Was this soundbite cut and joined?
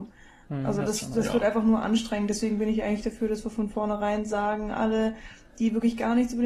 no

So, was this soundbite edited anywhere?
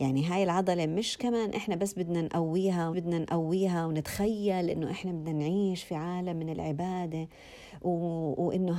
yes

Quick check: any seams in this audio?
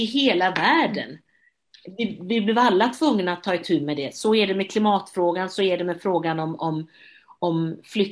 no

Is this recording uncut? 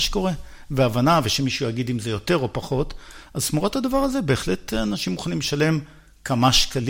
yes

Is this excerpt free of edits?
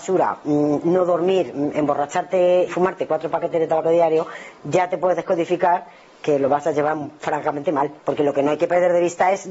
no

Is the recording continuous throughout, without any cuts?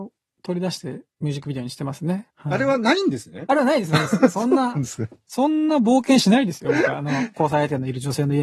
no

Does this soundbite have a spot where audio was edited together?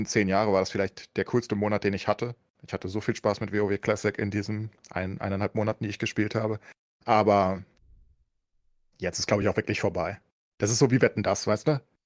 no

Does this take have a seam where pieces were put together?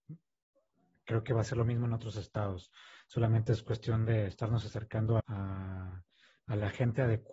yes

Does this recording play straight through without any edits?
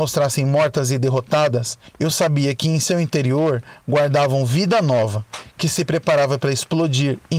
yes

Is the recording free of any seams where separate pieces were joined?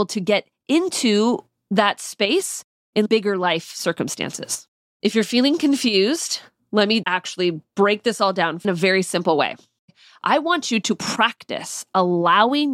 no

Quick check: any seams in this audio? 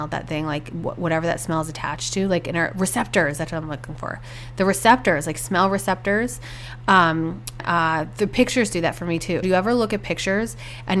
yes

